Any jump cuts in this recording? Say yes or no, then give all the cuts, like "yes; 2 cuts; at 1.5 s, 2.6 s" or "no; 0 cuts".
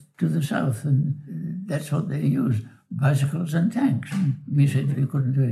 no; 0 cuts